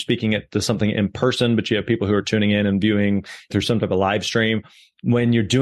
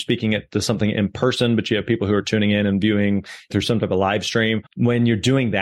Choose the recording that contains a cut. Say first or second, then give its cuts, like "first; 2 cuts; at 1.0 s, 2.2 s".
second; 1 cut; at 4.7 s